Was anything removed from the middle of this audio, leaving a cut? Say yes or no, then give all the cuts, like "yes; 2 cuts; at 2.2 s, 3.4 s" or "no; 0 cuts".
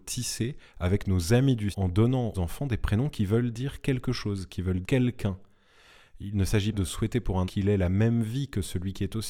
yes; 5 cuts; at 1.7 s, 2.3 s, 4.8 s, 6.7 s, 7.4 s